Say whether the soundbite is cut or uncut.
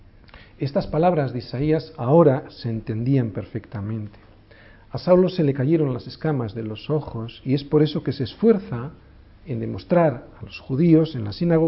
uncut